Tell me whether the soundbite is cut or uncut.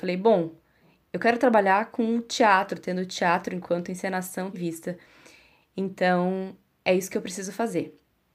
cut